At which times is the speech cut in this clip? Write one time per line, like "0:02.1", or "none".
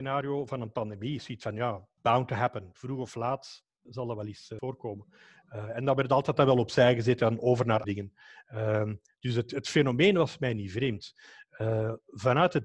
0:02.0
0:03.9
0:04.6
0:07.8

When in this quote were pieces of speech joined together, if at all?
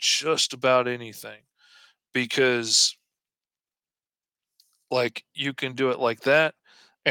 none

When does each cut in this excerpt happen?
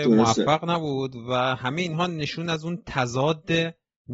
none

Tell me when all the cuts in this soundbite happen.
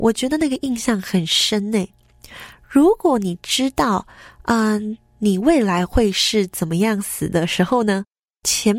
none

